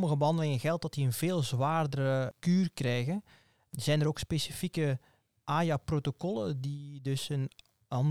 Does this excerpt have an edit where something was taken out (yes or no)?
no